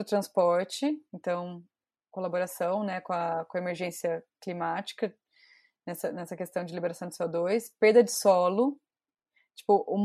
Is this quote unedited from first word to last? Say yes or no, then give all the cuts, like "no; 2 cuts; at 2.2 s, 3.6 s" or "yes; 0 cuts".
yes; 0 cuts